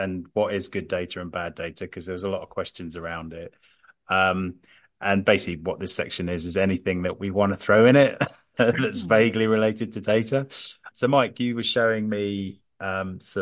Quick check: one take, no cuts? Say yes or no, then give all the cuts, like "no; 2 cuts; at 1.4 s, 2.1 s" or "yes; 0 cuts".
yes; 0 cuts